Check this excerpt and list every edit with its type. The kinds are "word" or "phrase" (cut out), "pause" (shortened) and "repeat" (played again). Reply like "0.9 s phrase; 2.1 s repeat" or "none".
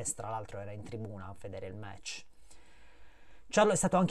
none